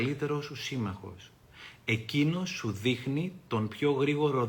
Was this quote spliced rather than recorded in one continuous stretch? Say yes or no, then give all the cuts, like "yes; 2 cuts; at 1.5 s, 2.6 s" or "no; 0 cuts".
no; 0 cuts